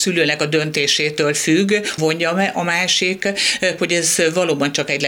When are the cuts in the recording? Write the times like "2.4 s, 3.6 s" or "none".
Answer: 2.0 s, 3.8 s